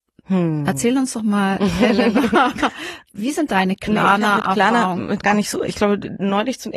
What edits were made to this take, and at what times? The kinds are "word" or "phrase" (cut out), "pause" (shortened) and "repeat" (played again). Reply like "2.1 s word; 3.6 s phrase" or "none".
5.2 s word

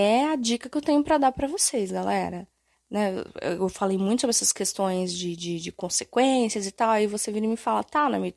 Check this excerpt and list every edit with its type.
2.7 s pause

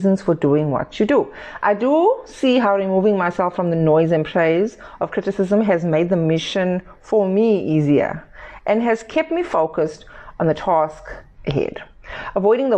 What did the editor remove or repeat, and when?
none

